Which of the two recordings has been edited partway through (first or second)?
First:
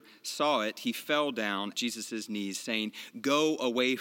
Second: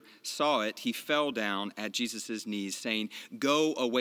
first